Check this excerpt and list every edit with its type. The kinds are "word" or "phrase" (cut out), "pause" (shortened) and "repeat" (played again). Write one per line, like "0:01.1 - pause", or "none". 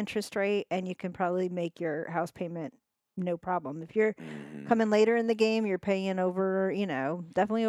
none